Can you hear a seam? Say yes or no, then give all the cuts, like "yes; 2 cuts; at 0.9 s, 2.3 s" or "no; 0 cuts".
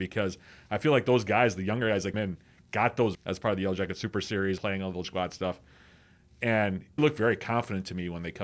yes; 5 cuts; at 2.1 s, 3.1 s, 4.6 s, 5.0 s, 7.0 s